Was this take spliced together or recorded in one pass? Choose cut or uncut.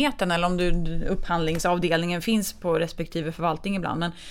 uncut